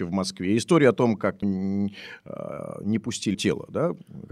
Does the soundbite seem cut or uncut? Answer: cut